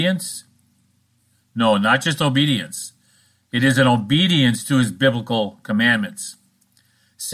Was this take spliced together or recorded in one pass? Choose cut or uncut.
uncut